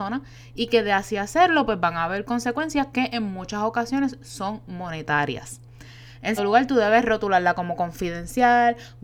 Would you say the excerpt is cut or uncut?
cut